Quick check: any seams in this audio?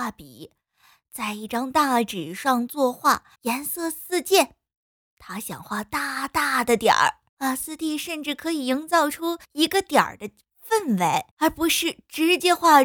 yes; 4 cuts; at 3.3 s, 7.3 s, 9.4 s, 11.3 s

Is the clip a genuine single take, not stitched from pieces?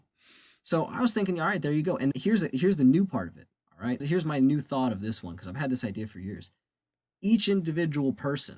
no; 2 cuts; at 2.1 s, 4.0 s

